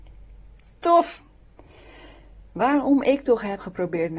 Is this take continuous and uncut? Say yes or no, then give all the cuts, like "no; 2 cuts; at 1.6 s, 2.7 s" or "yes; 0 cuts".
no; 1 cut; at 2.5 s